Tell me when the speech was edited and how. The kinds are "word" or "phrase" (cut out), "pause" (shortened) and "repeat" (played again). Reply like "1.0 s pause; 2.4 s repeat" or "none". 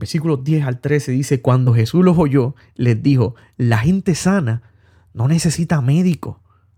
none